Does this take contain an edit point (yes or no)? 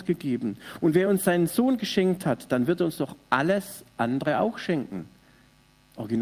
no